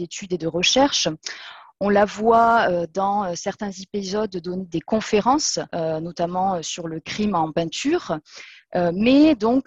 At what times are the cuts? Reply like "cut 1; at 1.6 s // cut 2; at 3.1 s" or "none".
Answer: cut 1; at 5.7 s